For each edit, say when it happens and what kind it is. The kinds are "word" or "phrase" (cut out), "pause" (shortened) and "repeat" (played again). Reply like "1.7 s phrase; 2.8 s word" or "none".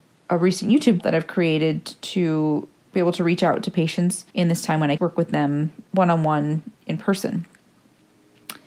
1.0 s word; 4.3 s pause; 5.0 s word; 6.8 s pause